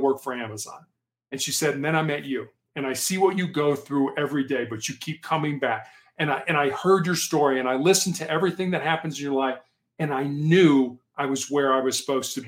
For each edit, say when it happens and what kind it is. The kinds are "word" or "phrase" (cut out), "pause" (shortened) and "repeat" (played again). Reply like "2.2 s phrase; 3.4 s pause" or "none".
none